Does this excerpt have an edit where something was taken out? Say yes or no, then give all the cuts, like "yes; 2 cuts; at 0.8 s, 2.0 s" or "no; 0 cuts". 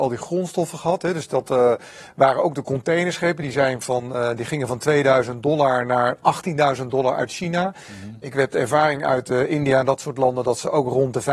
no; 0 cuts